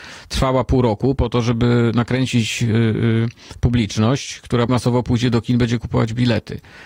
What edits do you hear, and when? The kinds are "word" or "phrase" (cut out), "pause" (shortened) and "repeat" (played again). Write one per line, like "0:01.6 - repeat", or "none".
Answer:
0:04.7 - word